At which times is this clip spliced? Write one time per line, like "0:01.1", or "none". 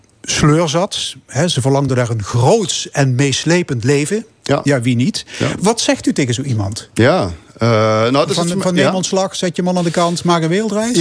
none